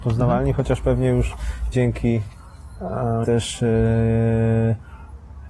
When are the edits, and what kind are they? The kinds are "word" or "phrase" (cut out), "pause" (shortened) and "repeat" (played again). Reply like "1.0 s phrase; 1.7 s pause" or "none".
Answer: 1.7 s word; 3.2 s word